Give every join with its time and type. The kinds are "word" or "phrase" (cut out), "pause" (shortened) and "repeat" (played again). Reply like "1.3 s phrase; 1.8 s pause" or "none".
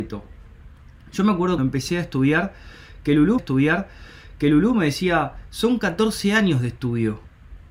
1.6 s word; 3.4 s repeat